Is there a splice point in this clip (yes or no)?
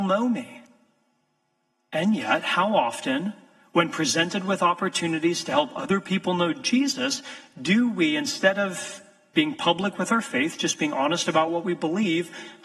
no